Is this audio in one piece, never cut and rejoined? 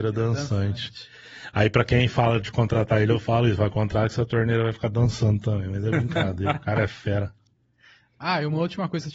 yes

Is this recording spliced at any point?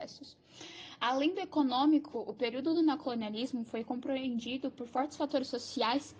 no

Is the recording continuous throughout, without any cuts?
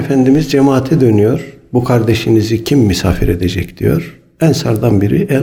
yes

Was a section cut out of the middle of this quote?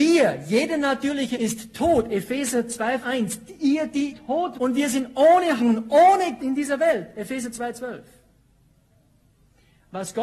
yes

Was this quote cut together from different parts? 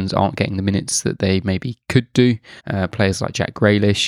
yes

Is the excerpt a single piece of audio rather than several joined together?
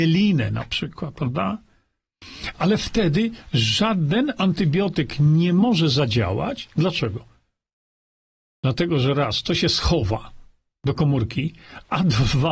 yes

